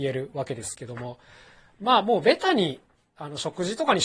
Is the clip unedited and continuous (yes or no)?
yes